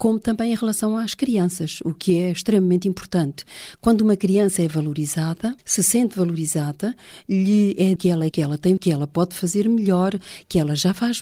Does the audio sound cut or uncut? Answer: cut